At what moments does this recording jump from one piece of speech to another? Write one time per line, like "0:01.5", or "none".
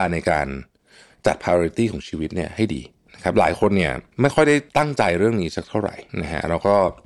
0:04.1
0:04.7
0:06.1